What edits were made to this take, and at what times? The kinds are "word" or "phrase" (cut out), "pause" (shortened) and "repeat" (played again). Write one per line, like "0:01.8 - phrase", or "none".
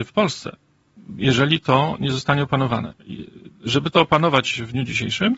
none